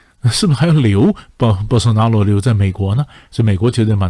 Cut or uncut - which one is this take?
uncut